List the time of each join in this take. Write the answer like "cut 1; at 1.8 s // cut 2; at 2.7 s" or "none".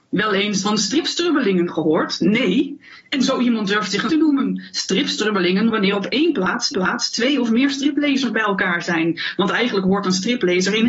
cut 1; at 4.1 s // cut 2; at 5.7 s // cut 3; at 6.7 s